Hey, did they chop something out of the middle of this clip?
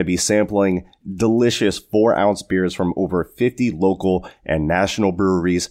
no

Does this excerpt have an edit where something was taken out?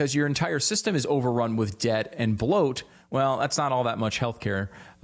no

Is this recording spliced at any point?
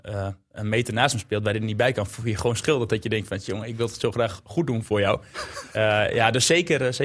no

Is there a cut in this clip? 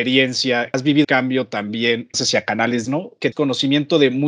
yes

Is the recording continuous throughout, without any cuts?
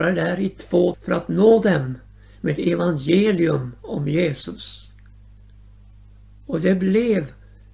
no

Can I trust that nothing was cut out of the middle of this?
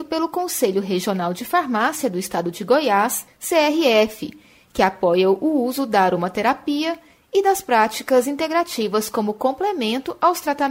yes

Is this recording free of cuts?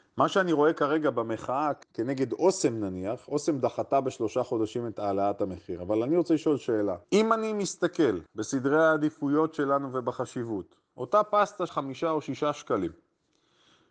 no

